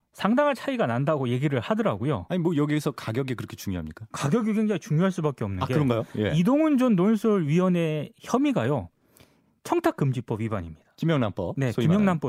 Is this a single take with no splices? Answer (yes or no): yes